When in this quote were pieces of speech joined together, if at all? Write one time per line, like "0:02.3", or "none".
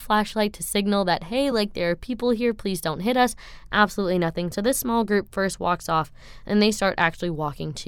none